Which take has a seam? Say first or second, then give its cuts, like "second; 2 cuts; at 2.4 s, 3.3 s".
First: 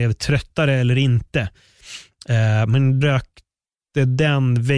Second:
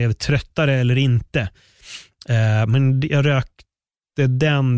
first; 1 cut; at 3.0 s